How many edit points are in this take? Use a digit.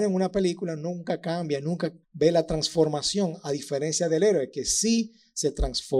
1